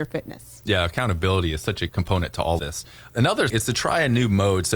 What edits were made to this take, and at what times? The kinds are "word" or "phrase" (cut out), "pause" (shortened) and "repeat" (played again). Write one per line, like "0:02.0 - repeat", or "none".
0:01.9 - word
0:02.6 - word
0:03.5 - word